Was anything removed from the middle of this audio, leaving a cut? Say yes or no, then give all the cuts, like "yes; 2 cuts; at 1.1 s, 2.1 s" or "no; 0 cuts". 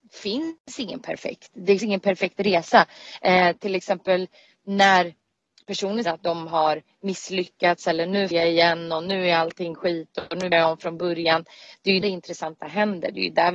yes; 5 cuts; at 1.8 s, 6.0 s, 8.3 s, 10.5 s, 12.0 s